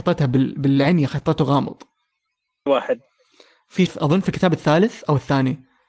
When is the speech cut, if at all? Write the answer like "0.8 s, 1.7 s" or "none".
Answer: 2.7 s, 3.9 s